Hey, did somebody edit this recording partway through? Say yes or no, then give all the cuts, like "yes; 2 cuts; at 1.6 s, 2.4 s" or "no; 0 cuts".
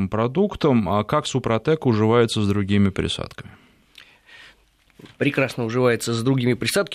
no; 0 cuts